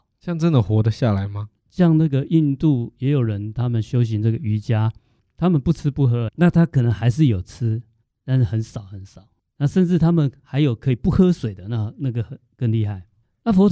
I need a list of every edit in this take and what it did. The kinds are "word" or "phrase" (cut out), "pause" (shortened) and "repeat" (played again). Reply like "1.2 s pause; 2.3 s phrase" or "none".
6.3 s word